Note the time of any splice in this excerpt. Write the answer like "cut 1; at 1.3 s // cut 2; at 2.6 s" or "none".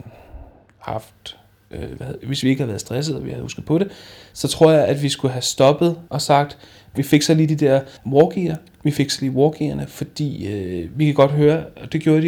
cut 1; at 6.1 s // cut 2; at 8.0 s